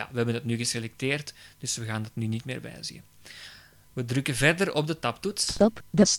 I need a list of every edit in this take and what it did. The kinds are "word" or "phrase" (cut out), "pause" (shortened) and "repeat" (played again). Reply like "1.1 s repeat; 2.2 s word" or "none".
none